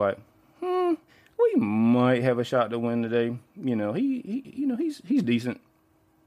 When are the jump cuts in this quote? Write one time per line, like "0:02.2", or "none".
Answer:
0:01.1